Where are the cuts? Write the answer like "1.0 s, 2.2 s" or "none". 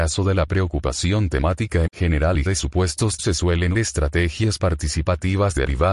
1.9 s, 2.5 s, 3.2 s, 3.7 s